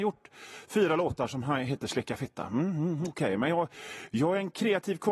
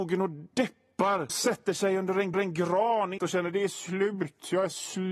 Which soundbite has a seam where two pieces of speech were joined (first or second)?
second